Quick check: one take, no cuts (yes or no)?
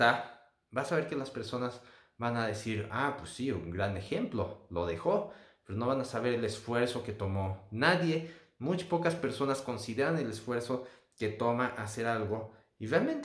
yes